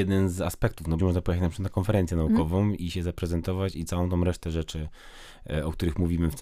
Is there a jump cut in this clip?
yes; 2 cuts; at 1.0 s, 2.8 s

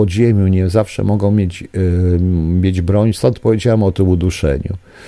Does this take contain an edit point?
no; 0 cuts

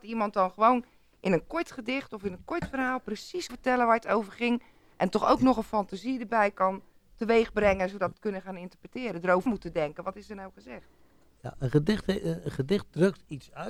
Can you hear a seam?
yes; 3 cuts; at 3.5 s, 8.1 s, 9.5 s

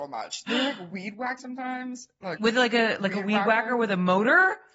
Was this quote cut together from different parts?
yes; 2 cuts; at 1.4 s, 2.4 s

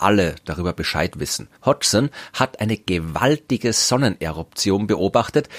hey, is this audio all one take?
no; 1 cut; at 1.6 s

